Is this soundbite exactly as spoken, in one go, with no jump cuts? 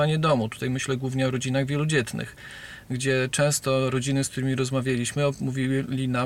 yes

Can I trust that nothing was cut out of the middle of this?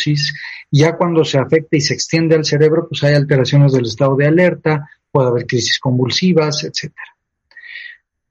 yes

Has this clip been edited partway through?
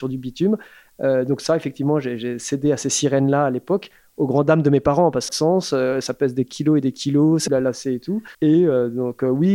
yes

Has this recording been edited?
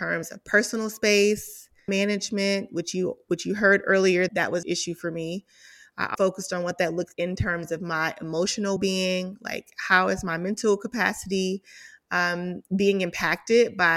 yes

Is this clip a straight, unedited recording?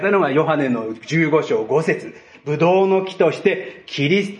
yes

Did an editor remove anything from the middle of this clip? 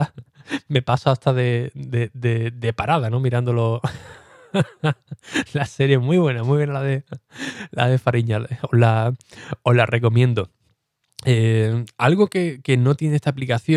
no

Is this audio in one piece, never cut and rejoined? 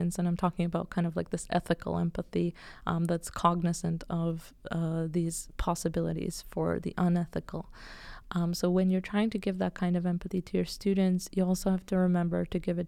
yes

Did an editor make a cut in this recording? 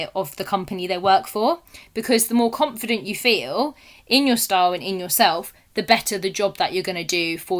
no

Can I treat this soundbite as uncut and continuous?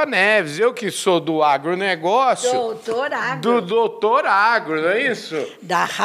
yes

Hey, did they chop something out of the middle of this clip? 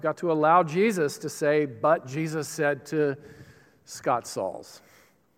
no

